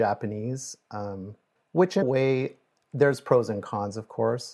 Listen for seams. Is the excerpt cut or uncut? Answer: cut